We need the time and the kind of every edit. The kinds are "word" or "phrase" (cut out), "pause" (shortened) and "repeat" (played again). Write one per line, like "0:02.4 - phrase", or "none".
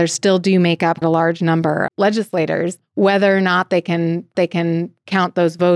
0:01.0 - word
0:01.9 - word
0:04.3 - repeat

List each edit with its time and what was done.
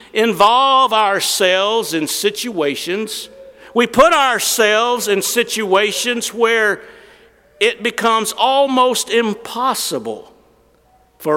none

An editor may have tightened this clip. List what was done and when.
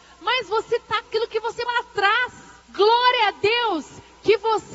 0:01.1 - word
0:01.7 - word
0:02.6 - pause

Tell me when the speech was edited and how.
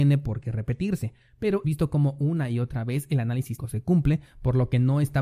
0:01.6 - word
0:03.6 - word

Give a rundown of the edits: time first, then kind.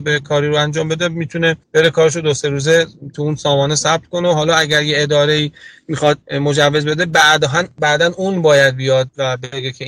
0:01.6 - pause
0:06.2 - pause

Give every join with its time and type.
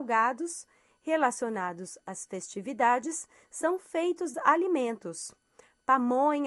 0:04.3 - word

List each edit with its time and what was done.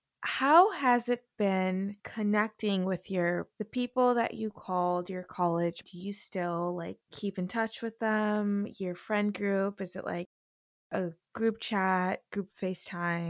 0:02.0 - pause
0:03.6 - phrase
0:05.8 - phrase
0:07.0 - pause

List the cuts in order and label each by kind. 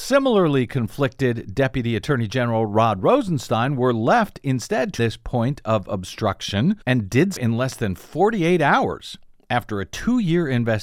0:05.0 - phrase
0:06.8 - pause
0:07.4 - word

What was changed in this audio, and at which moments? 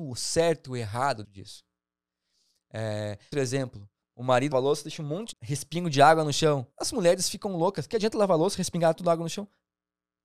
0:01.2 - word
0:03.3 - word
0:04.0 - word
0:04.5 - word
0:05.3 - word
0:06.7 - pause

